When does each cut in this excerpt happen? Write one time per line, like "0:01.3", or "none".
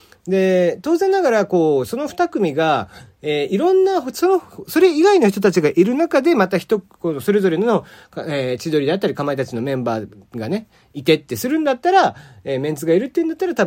none